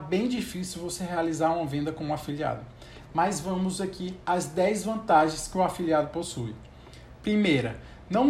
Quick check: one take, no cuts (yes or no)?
yes